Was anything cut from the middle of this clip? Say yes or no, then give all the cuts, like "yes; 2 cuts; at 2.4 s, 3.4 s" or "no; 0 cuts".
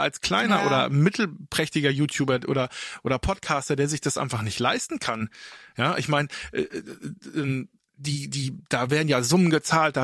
no; 0 cuts